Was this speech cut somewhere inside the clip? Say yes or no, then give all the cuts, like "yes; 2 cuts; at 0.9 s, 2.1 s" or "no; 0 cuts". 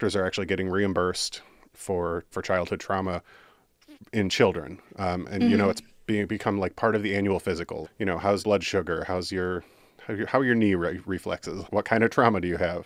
yes; 4 cuts; at 2.3 s, 7.8 s, 8.4 s, 11.6 s